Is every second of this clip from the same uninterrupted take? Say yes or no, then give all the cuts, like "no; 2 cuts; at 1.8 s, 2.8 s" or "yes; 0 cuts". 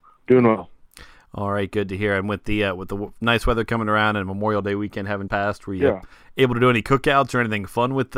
no; 1 cut; at 5.3 s